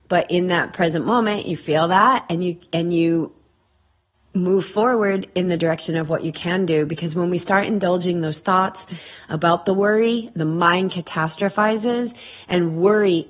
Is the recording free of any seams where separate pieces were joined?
yes; 0 cuts

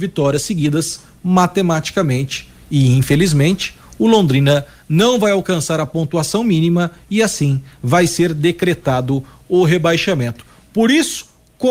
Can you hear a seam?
no; 0 cuts

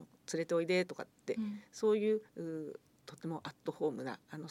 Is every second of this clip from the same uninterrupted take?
no; 1 cut; at 2.3 s

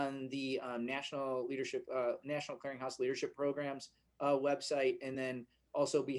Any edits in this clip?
no; 0 cuts

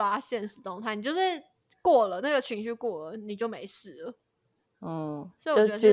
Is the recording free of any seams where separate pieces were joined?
yes; 0 cuts

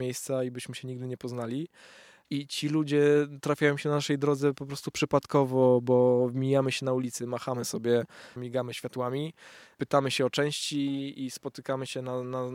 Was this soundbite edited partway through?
no; 0 cuts

